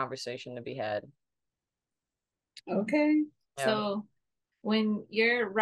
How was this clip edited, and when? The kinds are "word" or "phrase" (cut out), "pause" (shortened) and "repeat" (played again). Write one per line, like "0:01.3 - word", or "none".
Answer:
none